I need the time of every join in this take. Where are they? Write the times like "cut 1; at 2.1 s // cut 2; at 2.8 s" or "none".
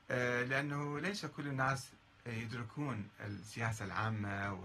none